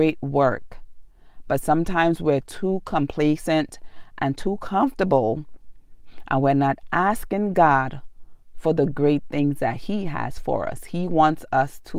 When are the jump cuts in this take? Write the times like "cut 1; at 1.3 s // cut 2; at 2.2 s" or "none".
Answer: none